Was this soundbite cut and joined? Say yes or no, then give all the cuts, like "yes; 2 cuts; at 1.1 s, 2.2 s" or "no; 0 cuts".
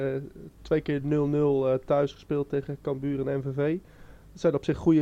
no; 0 cuts